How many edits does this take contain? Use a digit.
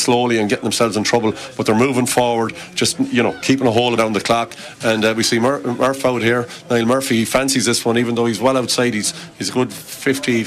1